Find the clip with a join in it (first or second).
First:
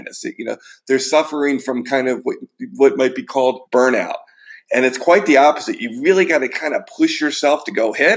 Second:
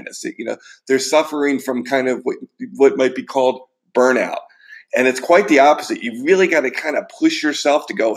first